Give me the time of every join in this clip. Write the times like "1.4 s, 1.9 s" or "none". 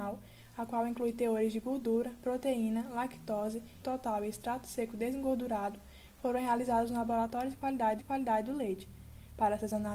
3.8 s, 8.0 s